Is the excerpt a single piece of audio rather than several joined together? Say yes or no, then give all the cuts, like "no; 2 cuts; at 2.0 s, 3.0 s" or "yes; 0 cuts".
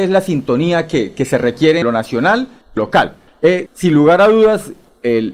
no; 3 cuts; at 1.8 s, 2.8 s, 3.7 s